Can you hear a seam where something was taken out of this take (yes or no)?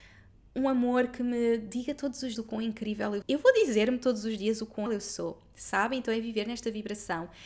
yes